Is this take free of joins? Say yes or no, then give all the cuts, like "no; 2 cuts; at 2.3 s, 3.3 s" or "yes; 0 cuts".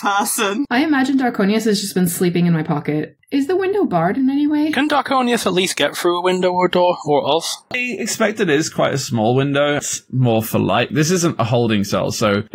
yes; 0 cuts